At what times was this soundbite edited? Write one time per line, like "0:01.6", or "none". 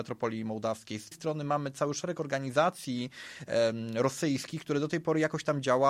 0:01.1